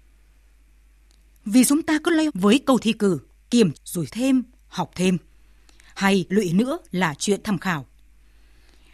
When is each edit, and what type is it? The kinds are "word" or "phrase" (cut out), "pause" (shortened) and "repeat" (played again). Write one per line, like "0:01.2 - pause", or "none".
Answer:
0:01.7 - word
0:02.3 - word
0:02.8 - word
0:03.7 - word
0:04.1 - word
0:06.3 - word
0:07.4 - word